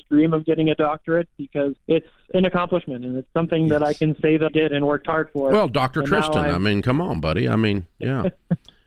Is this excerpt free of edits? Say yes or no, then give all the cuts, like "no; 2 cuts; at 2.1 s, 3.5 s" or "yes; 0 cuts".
no; 2 cuts; at 1.8 s, 4.5 s